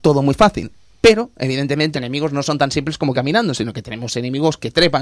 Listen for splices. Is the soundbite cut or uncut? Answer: cut